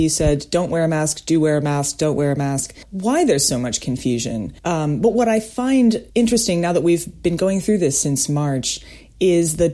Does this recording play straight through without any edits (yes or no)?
no